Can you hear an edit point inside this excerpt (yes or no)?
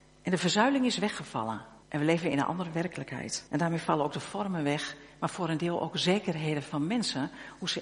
yes